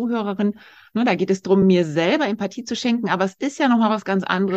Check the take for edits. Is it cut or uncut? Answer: uncut